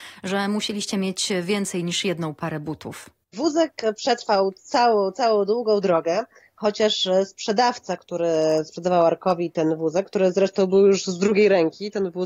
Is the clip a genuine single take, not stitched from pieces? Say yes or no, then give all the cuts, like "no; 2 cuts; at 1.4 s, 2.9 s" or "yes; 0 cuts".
yes; 0 cuts